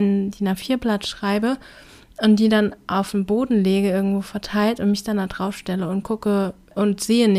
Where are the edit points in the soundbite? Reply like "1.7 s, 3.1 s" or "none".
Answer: none